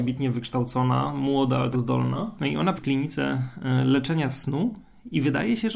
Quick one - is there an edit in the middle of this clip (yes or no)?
yes